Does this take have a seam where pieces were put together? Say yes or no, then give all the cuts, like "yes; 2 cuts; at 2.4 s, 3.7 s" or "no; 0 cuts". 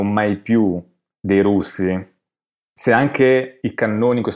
no; 0 cuts